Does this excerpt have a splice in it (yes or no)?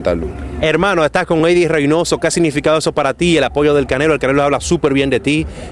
no